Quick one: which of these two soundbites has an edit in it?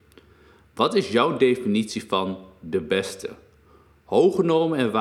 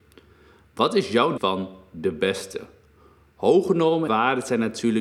second; 2 cuts; at 1.4 s, 4.1 s

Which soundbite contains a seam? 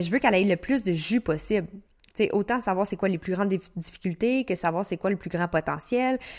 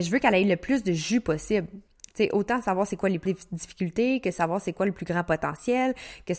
second; 1 cut; at 3.3 s

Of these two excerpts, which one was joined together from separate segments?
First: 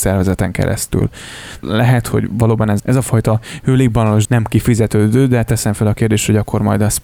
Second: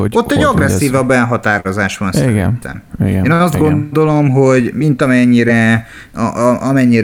first; 3 cuts; at 1.6 s, 2.8 s, 4.2 s

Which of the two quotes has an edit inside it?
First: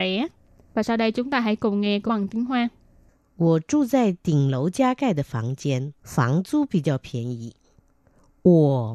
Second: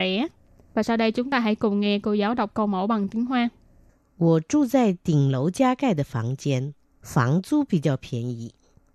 first; 2 cuts; at 2.1 s, 6.0 s

